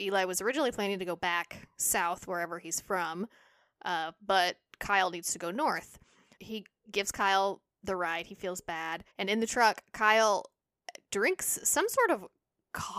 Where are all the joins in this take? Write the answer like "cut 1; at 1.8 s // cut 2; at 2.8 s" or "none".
cut 1; at 6.4 s // cut 2; at 9.1 s